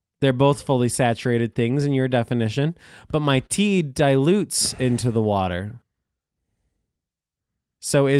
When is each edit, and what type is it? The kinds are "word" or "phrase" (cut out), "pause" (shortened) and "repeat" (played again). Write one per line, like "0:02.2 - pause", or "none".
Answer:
none